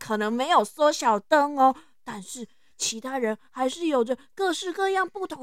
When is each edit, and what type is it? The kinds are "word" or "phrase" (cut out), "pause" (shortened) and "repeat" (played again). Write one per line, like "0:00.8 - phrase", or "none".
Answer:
none